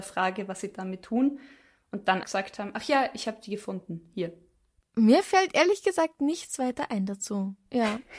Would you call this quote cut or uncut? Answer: cut